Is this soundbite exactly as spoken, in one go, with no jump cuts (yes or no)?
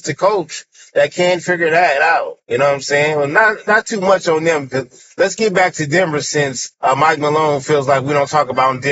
no